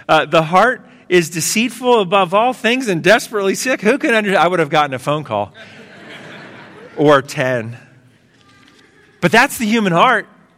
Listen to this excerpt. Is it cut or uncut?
uncut